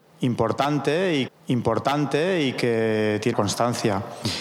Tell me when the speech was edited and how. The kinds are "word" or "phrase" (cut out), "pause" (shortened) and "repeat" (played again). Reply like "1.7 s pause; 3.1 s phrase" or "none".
1.3 s repeat; 3.3 s word